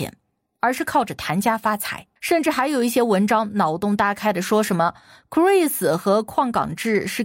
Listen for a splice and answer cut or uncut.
cut